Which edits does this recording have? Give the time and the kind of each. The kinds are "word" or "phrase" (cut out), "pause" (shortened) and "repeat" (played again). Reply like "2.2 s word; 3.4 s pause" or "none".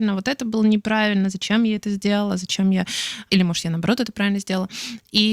none